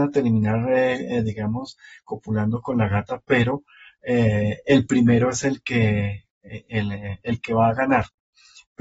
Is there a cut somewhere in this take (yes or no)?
no